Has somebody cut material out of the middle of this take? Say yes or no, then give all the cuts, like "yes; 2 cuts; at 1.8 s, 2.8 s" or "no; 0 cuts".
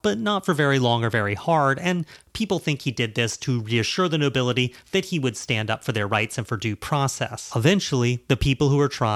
no; 0 cuts